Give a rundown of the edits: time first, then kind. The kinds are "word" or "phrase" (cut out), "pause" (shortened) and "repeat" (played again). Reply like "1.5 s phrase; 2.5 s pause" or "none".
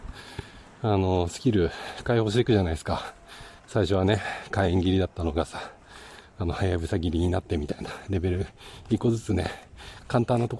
3.6 s pause